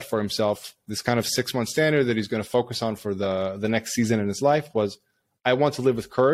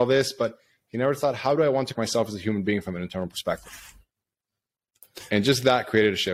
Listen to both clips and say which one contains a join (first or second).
second